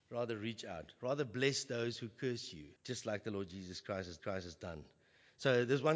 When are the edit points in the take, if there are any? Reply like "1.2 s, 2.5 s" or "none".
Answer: 2.8 s, 4.2 s